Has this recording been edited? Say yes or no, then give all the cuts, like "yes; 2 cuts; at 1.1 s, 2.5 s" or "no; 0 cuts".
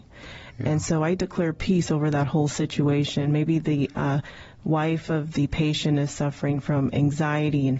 no; 0 cuts